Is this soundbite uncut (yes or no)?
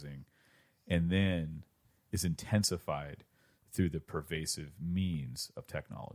yes